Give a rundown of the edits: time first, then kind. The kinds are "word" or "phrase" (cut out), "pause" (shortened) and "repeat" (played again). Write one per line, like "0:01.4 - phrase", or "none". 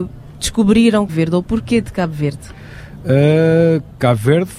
0:01.1 - word